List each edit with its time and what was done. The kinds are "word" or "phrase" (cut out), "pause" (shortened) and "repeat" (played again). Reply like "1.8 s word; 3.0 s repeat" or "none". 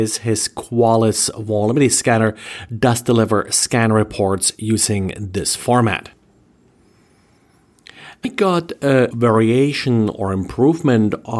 8.2 s word; 9.1 s word